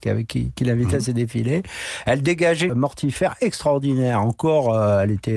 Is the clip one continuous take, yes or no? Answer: no